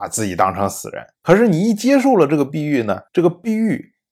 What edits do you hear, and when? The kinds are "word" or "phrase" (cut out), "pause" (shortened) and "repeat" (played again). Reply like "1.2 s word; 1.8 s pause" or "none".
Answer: 1.1 s pause; 3.1 s pause